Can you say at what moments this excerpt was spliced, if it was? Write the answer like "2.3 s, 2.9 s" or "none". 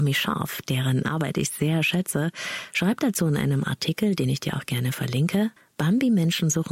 5.6 s